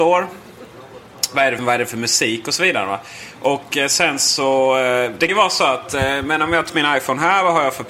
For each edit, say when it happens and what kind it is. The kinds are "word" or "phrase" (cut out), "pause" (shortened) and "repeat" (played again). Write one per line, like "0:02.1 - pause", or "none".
0:01.6 - word
0:05.3 - word
0:06.7 - word